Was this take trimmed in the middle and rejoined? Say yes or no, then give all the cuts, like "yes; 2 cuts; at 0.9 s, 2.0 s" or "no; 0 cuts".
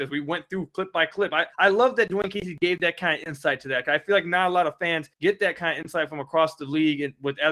yes; 2 cuts; at 1.5 s, 5.1 s